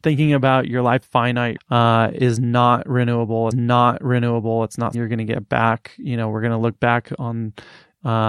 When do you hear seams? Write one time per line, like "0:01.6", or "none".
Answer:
0:01.0
0:01.6
0:03.5
0:04.9